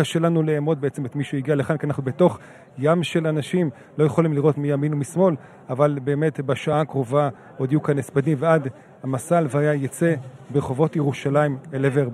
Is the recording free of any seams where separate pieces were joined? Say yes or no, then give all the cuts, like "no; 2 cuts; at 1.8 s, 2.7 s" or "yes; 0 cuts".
yes; 0 cuts